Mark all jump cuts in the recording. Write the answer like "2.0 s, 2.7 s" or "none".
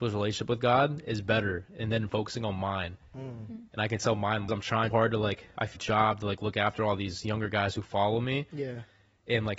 4.5 s, 4.9 s, 5.8 s